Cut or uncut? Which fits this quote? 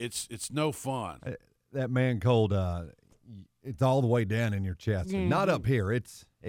uncut